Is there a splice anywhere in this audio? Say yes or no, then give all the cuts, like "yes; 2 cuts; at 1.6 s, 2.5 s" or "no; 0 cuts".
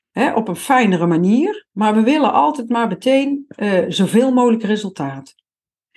yes; 1 cut; at 1.7 s